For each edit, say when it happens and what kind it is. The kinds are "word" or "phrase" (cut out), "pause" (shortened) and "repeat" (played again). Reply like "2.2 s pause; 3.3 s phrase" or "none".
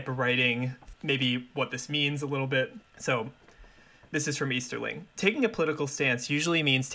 2.8 s pause; 5.1 s pause